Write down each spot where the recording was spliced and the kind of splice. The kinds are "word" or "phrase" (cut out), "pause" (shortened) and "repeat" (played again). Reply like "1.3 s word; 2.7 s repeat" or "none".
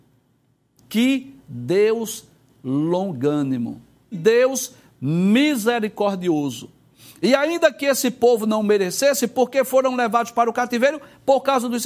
4.1 s word